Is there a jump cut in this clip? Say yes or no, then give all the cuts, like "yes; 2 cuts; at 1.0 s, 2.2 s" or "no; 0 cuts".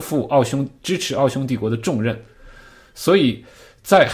no; 0 cuts